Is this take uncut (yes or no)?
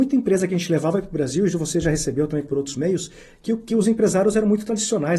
yes